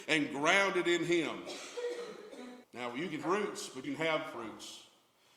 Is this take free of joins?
no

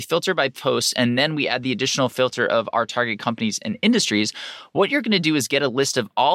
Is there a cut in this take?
no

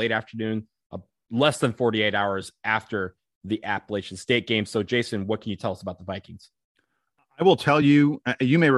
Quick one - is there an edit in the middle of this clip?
no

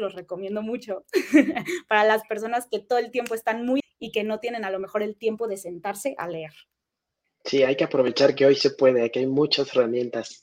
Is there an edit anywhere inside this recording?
yes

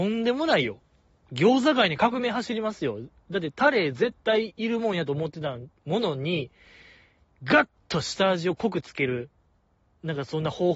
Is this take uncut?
yes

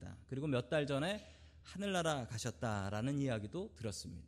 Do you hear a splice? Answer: no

